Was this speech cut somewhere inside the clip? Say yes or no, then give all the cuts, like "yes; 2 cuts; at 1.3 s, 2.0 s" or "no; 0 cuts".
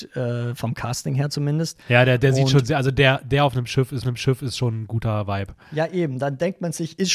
yes; 1 cut; at 4.0 s